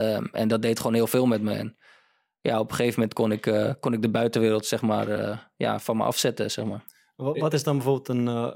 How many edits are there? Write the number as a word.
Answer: zero